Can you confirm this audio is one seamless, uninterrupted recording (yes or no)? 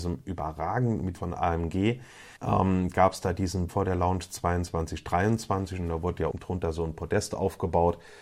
no